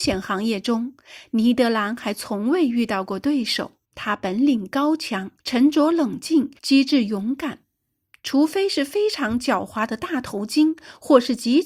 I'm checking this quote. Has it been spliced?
yes; 3 cuts; at 3.8 s, 5.4 s, 6.6 s

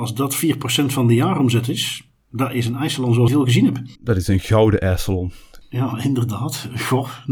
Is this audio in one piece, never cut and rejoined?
no; 3 cuts; at 3.3 s, 3.9 s, 5.6 s

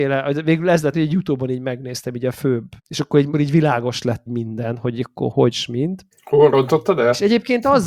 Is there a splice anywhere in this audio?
yes; 6 cuts; at 0.9 s, 2.8 s, 3.3 s, 4.3 s, 5.3 s, 6.1 s

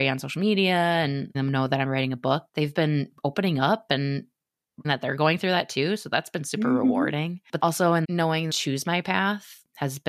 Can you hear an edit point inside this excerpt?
yes; 6 cuts; at 1.3 s, 2.5 s, 4.8 s, 7.6 s, 8.0 s, 8.5 s

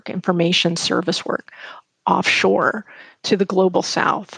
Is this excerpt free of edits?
yes; 0 cuts

